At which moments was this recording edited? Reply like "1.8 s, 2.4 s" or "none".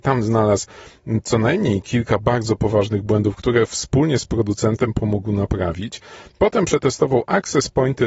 none